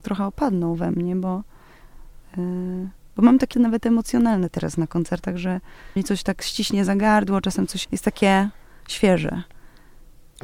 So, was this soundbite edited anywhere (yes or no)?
yes